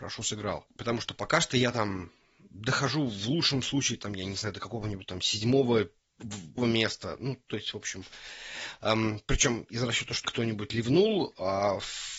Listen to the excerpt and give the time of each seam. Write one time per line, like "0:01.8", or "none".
0:06.6
0:10.2